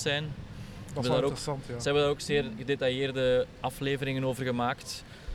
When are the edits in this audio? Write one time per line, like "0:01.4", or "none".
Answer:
none